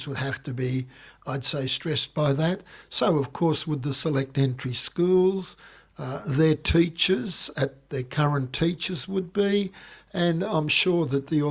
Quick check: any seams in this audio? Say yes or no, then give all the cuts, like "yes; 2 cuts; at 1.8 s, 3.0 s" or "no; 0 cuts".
no; 0 cuts